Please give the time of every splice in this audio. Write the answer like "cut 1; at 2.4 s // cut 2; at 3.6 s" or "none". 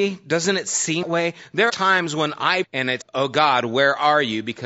cut 1; at 1.0 s // cut 2; at 1.7 s // cut 3; at 2.6 s // cut 4; at 3.0 s